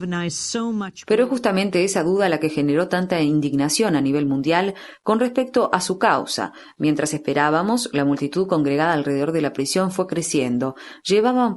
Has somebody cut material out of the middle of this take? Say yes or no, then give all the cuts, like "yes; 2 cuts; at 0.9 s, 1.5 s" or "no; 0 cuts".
no; 0 cuts